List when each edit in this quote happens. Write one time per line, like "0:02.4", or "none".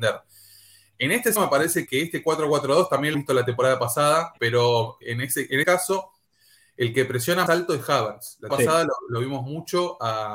0:01.4
0:01.9
0:03.1
0:04.4
0:05.0
0:05.6
0:07.5
0:08.5